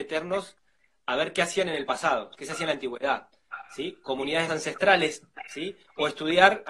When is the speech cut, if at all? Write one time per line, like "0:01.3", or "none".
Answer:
0:04.5